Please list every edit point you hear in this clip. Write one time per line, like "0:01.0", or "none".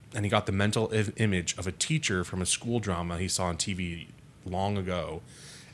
none